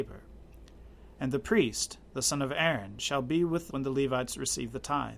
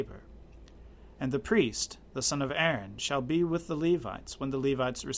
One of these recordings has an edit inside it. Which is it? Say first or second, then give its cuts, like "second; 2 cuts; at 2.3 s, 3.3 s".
first; 1 cut; at 3.7 s